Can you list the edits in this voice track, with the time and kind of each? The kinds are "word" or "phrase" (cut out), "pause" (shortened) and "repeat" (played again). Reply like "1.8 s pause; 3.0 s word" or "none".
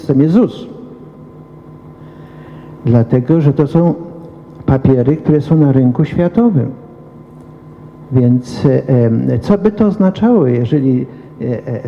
none